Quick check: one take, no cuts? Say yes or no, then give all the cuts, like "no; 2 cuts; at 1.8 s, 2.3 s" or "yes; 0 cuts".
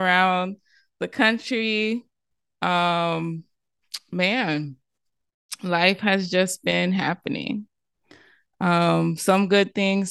yes; 0 cuts